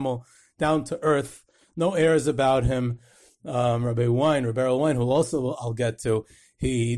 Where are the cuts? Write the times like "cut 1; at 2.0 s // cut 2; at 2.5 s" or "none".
none